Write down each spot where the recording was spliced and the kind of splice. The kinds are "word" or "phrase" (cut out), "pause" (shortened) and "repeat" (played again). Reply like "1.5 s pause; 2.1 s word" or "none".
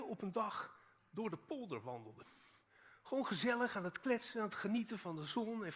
none